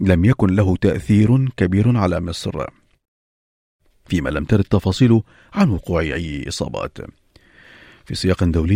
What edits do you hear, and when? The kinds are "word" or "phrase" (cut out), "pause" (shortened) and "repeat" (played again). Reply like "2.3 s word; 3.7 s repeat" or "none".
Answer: none